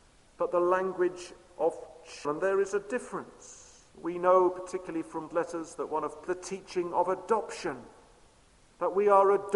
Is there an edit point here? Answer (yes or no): yes